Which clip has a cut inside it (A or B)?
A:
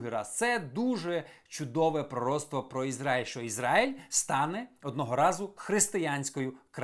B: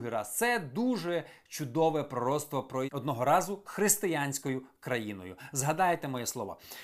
B